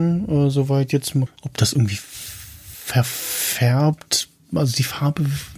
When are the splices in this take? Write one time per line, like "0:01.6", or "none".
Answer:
0:01.3